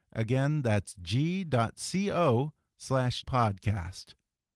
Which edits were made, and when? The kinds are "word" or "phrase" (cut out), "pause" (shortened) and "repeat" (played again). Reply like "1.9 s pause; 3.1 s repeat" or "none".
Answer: 3.2 s word

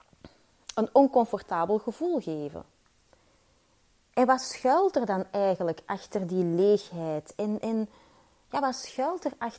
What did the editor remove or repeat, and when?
none

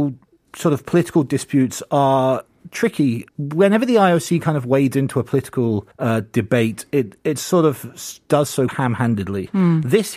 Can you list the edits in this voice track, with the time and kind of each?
3.3 s pause; 5.9 s pause; 8.7 s word

